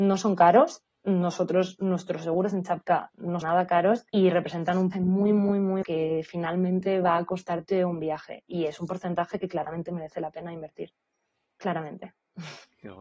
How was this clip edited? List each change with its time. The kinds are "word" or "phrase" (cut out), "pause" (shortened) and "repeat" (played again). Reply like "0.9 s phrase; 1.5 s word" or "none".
3.4 s phrase; 4.1 s pause; 4.9 s word; 5.8 s phrase